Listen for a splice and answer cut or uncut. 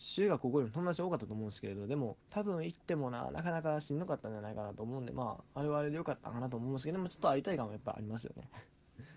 cut